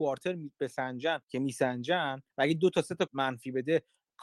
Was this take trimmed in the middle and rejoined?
yes; 3 cuts; at 1.2 s, 2.3 s, 3.1 s

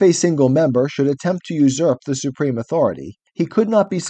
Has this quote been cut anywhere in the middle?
no; 0 cuts

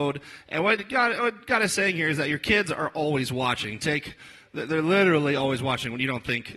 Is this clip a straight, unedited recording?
yes; 0 cuts

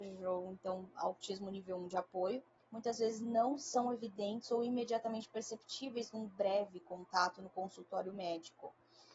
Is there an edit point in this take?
yes; 1 cut; at 2.6 s

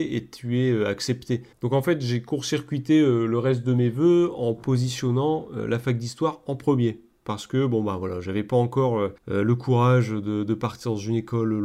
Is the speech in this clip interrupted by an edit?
yes; 2 cuts; at 1.5 s, 9.2 s

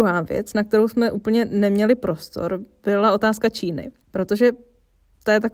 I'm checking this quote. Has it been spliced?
yes; 1 cut; at 4.0 s

